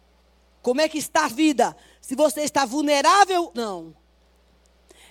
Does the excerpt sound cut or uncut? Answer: cut